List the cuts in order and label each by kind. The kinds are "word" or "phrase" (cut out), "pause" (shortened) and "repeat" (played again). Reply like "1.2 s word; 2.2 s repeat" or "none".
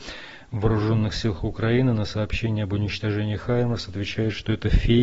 none